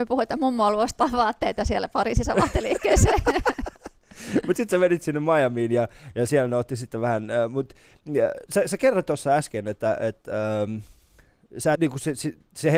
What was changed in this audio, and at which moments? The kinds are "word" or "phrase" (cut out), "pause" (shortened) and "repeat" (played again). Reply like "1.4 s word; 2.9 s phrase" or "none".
11.7 s word